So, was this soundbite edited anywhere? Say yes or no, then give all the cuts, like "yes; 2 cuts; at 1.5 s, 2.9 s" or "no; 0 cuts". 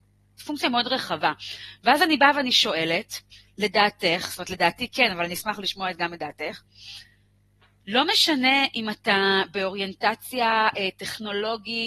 yes; 1 cut; at 3.3 s